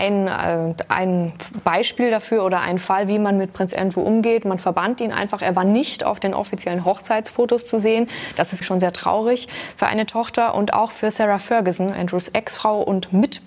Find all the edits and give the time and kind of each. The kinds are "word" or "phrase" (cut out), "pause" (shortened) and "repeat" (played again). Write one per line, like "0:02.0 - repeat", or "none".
0:08.6 - word
0:11.9 - word